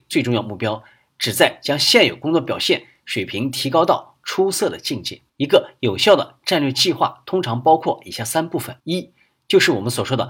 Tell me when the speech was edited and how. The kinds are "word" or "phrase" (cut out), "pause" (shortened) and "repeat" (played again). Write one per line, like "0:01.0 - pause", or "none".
0:05.3 - pause
0:08.8 - pause